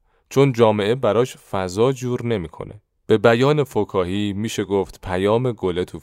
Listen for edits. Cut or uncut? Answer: uncut